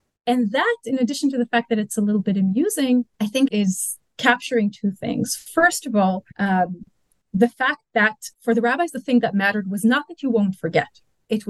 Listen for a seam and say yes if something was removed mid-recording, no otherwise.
yes